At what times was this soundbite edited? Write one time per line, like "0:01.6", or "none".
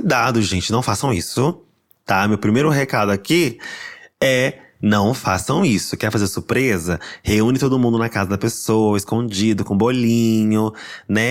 none